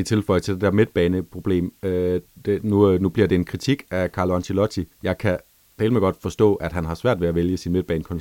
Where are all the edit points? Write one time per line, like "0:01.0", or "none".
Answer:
0:04.9
0:05.5